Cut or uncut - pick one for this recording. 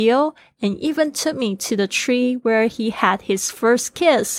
uncut